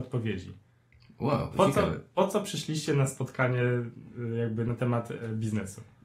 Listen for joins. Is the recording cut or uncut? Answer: uncut